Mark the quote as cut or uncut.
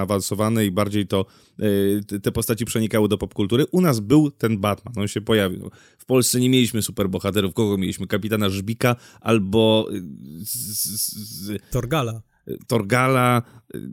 uncut